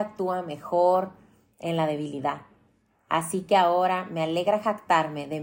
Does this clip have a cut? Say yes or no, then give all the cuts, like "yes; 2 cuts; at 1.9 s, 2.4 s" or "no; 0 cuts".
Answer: no; 0 cuts